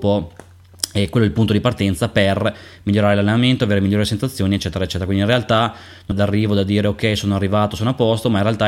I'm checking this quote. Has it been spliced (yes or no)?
yes